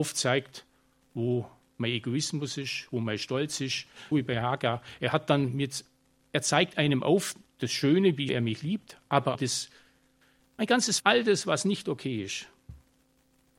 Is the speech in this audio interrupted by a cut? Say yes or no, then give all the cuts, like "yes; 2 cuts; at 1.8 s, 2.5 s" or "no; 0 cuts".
yes; 4 cuts; at 4.1 s, 8.3 s, 9.3 s, 11.0 s